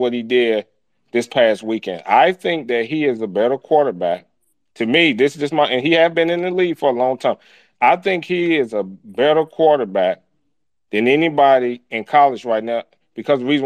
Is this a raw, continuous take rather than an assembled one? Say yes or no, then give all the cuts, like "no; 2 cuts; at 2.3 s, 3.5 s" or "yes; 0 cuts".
yes; 0 cuts